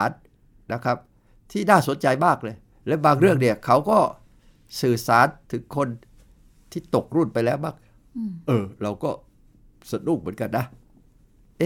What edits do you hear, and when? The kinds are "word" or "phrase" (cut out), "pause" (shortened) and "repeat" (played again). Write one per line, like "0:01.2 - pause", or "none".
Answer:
none